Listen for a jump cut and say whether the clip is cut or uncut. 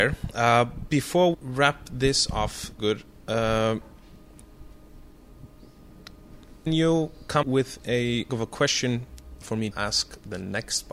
cut